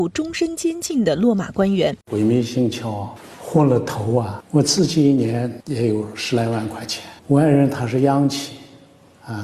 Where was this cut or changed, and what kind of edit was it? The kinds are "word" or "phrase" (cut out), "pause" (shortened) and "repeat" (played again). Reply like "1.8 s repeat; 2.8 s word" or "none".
2.0 s pause; 7.2 s pause

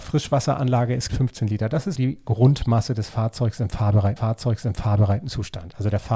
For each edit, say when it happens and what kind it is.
1.1 s phrase; 2.0 s word; 4.2 s repeat

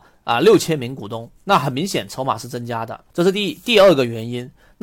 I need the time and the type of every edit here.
1.4 s pause; 3.1 s pause

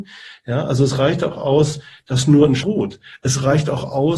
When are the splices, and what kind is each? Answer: 2.6 s word

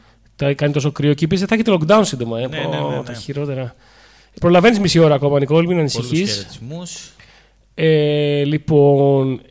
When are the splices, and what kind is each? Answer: none

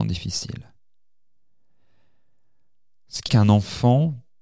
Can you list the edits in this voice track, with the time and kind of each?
3.3 s word

